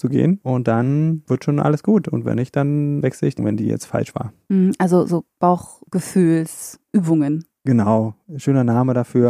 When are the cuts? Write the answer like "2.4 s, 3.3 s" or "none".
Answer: 3.0 s, 3.4 s